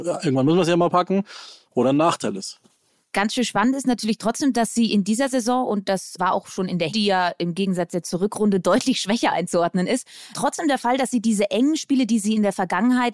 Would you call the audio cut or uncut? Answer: cut